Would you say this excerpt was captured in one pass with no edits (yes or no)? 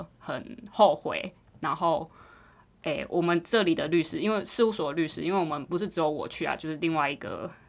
yes